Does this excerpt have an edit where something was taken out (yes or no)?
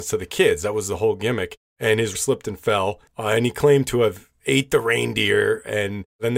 yes